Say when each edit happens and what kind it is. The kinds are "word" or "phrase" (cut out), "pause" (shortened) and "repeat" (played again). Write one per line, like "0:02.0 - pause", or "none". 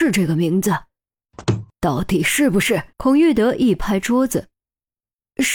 0:02.9 - pause

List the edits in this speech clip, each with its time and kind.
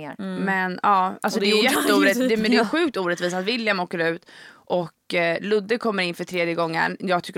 none

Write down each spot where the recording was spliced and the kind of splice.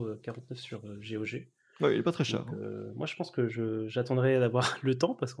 none

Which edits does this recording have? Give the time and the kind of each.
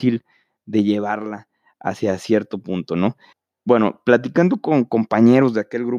0:03.3 - pause

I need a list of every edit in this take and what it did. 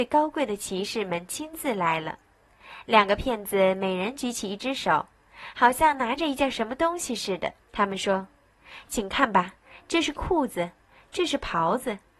0:07.6 - pause

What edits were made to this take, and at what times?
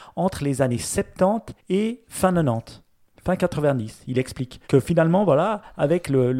0:01.6 - pause
0:04.6 - pause

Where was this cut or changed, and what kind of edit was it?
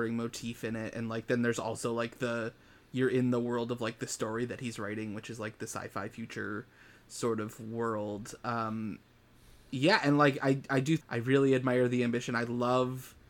0:11.0 - word

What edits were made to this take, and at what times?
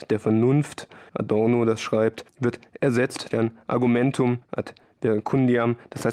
0:01.1 - word
0:02.3 - pause
0:03.3 - word
0:04.4 - pause

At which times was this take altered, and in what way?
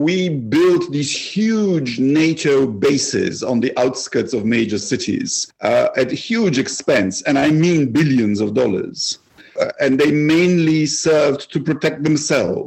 none

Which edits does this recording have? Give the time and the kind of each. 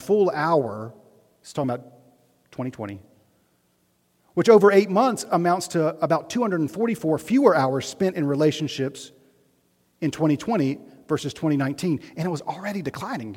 none

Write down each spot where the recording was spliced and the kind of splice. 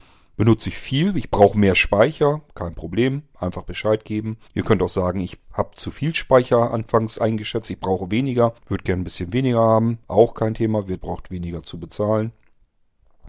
0:04.5 - pause
0:08.6 - pause
0:11.0 - phrase

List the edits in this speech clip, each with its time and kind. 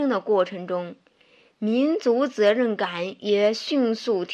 none

